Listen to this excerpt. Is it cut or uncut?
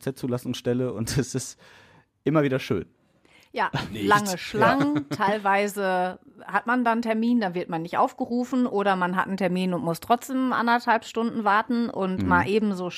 uncut